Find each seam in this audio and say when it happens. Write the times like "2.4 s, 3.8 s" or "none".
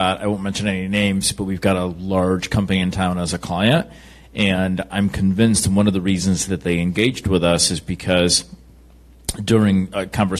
none